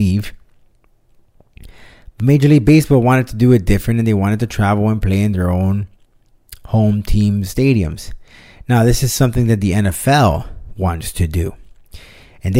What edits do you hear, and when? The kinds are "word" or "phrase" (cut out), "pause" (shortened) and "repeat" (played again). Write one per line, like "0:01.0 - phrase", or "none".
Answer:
none